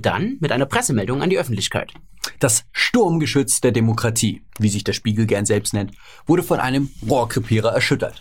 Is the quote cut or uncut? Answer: cut